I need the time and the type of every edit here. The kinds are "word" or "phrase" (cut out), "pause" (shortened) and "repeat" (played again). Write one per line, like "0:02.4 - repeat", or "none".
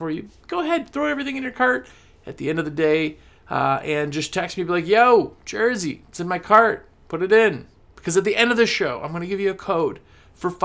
none